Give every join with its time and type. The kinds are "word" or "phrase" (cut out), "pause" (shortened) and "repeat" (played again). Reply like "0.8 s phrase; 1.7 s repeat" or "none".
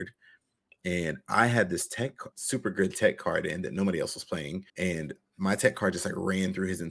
2.3 s pause; 4.7 s pause